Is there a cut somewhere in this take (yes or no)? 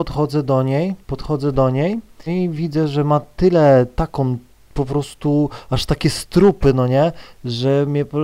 yes